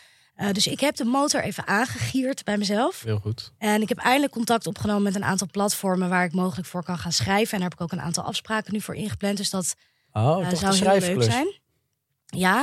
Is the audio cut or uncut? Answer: uncut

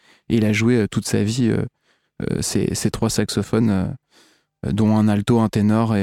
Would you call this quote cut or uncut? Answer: uncut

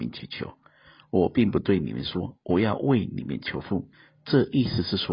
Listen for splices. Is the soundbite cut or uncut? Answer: cut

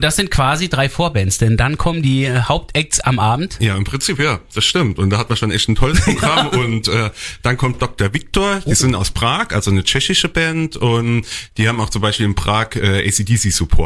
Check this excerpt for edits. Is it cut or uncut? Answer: uncut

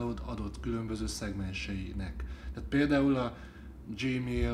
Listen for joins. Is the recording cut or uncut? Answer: uncut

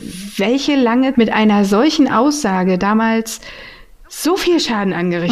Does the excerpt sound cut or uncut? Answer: cut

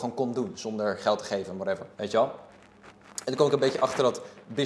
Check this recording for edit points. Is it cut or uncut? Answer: cut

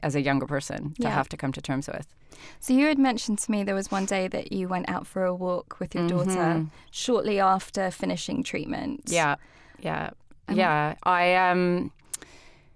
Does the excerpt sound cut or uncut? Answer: uncut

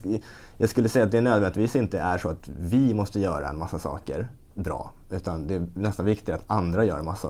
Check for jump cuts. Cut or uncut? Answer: uncut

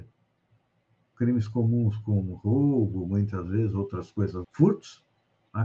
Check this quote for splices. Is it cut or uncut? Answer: cut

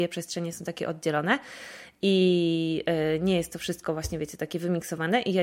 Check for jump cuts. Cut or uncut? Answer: uncut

